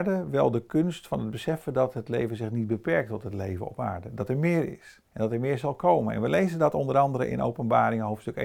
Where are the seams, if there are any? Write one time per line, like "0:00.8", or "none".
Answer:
0:05.1